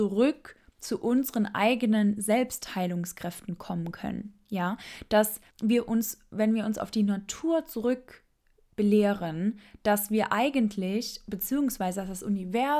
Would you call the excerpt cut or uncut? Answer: cut